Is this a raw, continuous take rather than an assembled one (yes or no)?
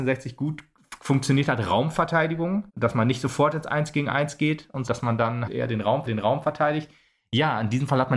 no